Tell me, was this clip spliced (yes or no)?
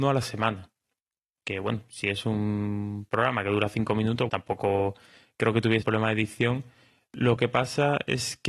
yes